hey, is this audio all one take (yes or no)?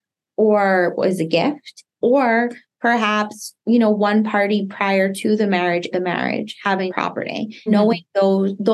no